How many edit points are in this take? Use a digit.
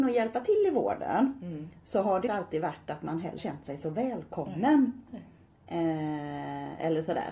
2